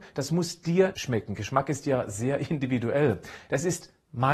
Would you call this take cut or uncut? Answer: cut